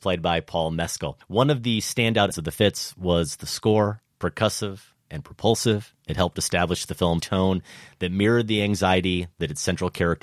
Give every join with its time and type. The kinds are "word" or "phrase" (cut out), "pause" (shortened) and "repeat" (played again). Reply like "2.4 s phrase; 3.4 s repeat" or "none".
1.2 s pause; 2.3 s word; 7.2 s word